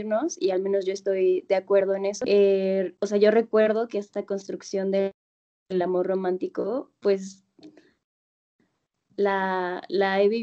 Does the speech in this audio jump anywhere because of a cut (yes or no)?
no